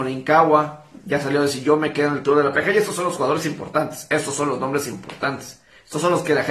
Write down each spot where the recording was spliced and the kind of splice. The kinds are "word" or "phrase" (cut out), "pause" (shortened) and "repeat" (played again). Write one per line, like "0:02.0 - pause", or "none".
none